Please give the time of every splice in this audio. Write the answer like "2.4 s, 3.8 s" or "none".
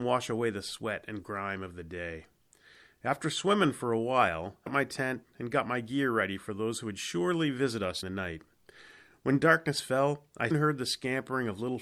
4.7 s, 8.0 s, 10.5 s